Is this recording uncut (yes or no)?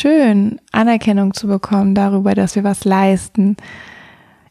yes